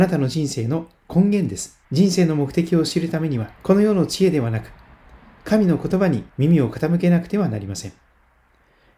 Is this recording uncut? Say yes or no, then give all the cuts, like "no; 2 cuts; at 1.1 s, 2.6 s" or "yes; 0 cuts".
no; 3 cuts; at 1.8 s, 3.6 s, 6.3 s